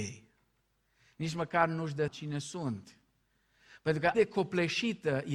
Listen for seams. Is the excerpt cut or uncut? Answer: cut